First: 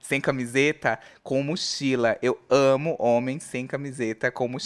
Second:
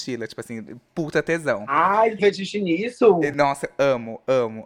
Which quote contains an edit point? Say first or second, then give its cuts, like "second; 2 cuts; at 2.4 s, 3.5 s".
second; 1 cut; at 2.2 s